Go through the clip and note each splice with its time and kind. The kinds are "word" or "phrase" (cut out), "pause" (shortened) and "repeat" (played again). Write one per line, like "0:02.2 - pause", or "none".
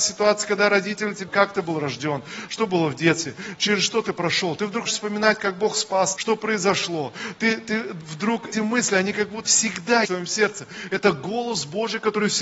0:01.3 - word
0:04.9 - word
0:06.2 - word
0:08.5 - word
0:09.4 - word
0:10.0 - word